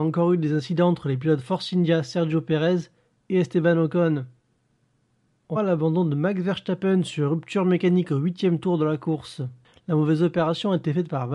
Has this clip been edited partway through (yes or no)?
yes